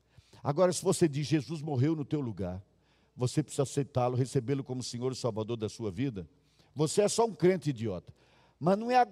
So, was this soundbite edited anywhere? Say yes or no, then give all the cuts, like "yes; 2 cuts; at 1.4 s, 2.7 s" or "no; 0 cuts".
no; 0 cuts